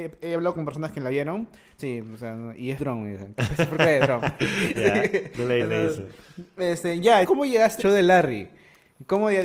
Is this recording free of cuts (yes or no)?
no